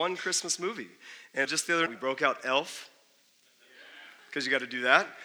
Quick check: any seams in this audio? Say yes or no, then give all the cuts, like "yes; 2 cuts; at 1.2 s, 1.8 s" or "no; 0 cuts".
yes; 2 cuts; at 1.4 s, 1.9 s